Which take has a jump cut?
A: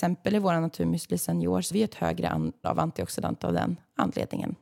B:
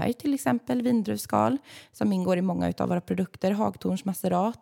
A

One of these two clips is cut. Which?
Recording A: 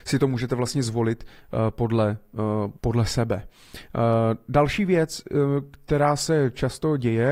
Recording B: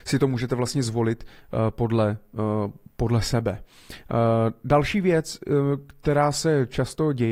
A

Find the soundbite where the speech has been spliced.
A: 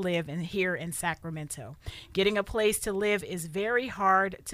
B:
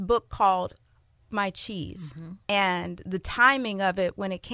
B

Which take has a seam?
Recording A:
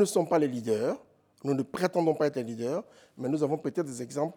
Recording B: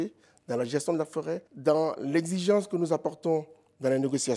B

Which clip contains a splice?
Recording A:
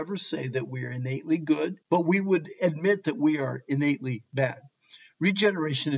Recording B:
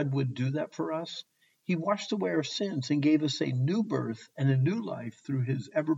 A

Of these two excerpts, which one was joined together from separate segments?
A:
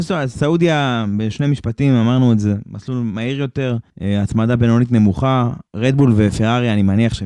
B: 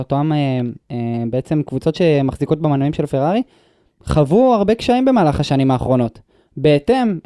A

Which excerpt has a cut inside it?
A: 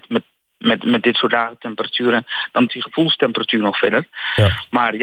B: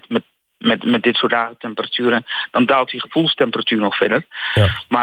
A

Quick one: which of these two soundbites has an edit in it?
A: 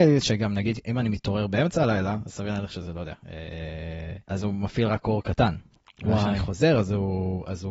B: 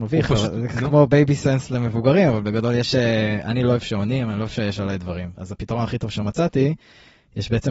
A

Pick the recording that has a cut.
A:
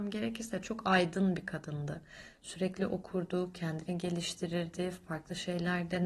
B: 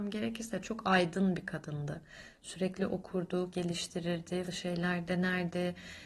B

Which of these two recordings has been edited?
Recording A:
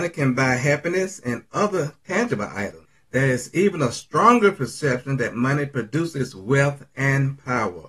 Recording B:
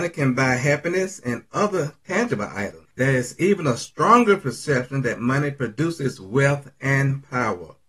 B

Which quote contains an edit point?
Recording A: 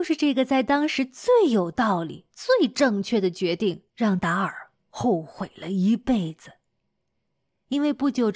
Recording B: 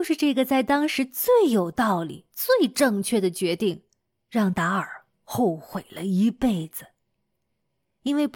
A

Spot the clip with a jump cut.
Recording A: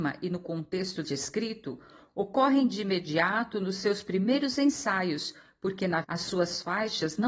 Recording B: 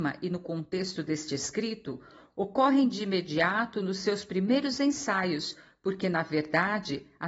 A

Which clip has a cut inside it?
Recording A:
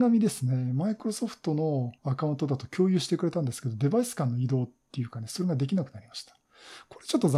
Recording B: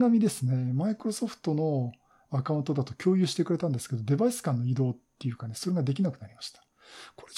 A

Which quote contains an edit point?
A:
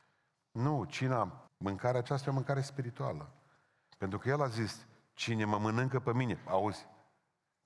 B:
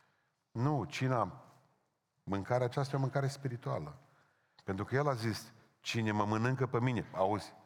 A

